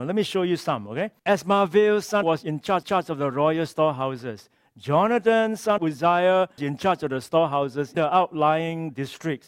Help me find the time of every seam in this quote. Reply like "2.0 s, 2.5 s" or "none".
1.2 s, 2.2 s, 2.8 s, 5.8 s, 6.6 s, 7.9 s

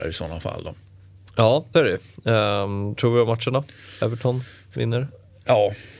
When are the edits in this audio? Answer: 1.7 s, 3.0 s

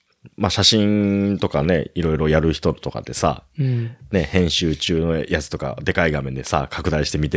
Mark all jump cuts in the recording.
none

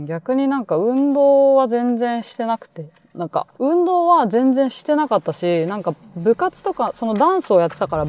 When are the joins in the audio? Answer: 3.5 s

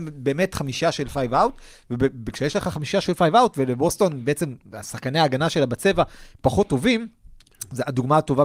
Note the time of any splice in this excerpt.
none

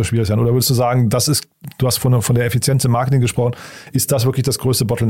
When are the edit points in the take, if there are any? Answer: none

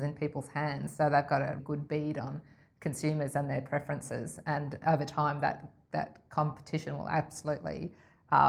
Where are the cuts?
1.6 s, 4.8 s

